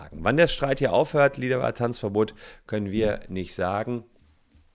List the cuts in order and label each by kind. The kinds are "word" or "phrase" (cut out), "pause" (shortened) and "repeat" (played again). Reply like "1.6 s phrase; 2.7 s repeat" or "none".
none